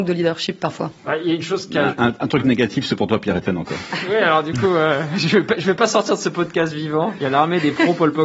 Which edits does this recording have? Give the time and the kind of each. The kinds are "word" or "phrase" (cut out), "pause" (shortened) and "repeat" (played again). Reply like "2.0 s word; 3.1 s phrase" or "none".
1.0 s pause